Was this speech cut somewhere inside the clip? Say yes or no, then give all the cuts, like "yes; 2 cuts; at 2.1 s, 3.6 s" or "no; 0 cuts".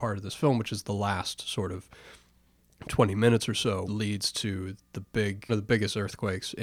yes; 2 cuts; at 3.9 s, 5.5 s